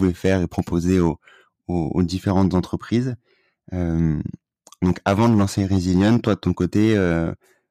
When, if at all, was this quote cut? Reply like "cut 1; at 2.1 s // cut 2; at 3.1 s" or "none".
none